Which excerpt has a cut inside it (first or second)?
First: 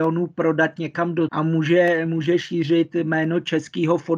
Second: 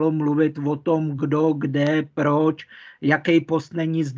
first